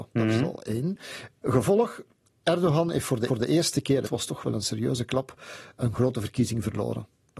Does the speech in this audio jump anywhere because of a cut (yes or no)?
yes